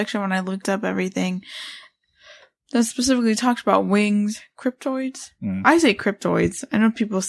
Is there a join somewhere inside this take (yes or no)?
no